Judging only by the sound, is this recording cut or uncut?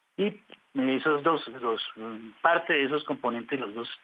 uncut